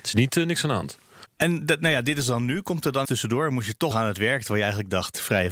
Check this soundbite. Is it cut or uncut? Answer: cut